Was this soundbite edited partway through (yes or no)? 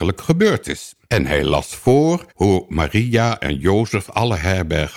yes